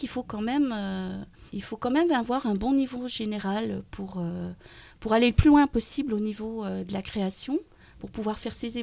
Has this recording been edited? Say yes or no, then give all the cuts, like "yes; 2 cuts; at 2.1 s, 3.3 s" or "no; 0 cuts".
yes; 1 cut; at 1.5 s